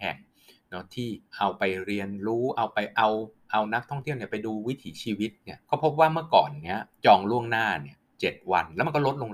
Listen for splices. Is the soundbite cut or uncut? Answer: cut